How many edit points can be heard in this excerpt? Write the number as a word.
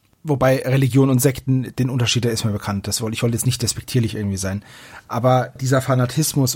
one